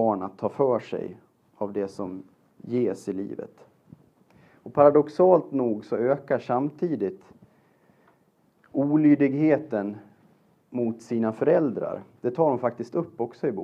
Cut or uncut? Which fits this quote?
uncut